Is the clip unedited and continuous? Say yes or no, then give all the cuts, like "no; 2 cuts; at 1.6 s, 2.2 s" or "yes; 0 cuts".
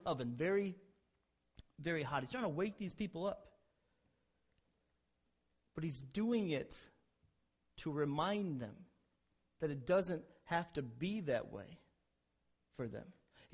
yes; 0 cuts